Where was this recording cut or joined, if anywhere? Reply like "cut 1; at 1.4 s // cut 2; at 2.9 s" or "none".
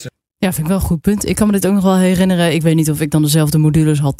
none